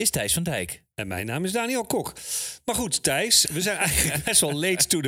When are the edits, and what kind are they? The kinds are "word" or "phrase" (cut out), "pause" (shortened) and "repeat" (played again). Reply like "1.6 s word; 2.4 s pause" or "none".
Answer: 3.5 s word